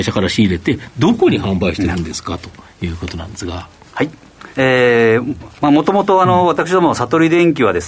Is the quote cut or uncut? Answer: cut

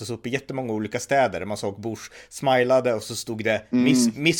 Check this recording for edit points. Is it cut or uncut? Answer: uncut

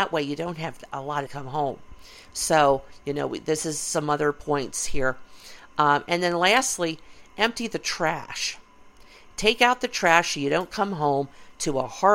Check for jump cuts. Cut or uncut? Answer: cut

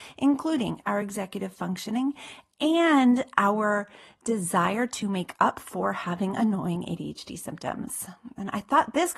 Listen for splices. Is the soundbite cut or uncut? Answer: uncut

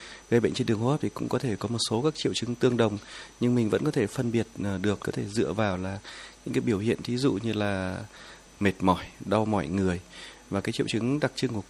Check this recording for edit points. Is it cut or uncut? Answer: cut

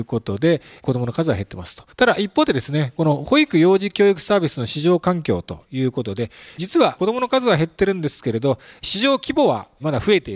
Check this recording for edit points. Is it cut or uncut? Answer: cut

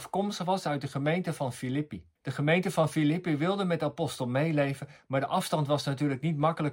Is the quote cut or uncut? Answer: cut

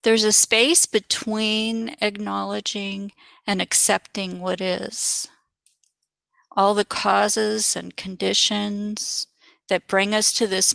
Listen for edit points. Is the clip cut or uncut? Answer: uncut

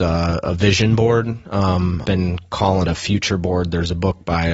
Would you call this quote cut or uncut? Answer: cut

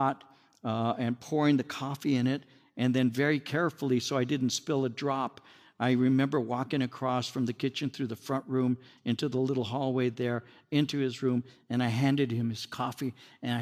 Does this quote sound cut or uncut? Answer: uncut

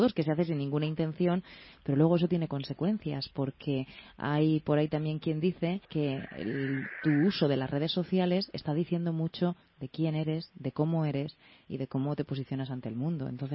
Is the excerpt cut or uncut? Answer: cut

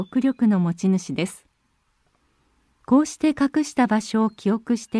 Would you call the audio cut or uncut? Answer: uncut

